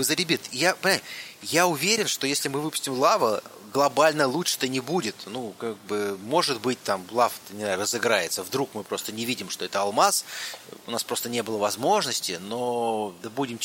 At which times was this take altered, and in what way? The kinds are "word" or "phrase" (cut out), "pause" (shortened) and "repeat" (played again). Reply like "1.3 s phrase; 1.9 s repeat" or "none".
none